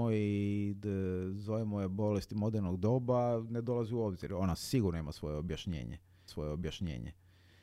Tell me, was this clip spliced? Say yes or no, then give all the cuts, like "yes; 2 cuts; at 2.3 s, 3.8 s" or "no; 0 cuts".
yes; 1 cut; at 6.3 s